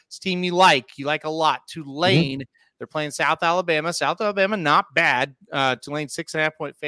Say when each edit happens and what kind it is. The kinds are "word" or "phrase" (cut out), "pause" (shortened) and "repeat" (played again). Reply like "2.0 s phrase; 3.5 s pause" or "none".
none